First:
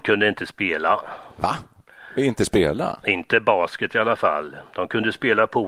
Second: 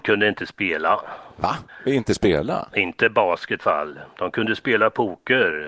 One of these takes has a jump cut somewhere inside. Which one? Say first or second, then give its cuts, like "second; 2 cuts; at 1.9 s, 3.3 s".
second; 2 cuts; at 1.7 s, 3.6 s